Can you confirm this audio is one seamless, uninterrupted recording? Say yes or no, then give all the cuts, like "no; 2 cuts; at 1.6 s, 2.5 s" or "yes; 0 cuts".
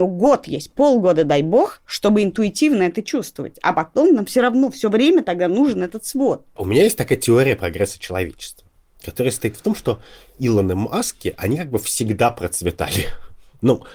yes; 0 cuts